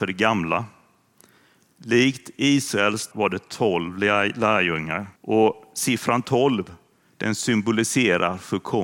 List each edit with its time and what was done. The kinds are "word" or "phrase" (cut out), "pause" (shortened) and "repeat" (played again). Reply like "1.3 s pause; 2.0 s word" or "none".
3.1 s phrase; 5.2 s pause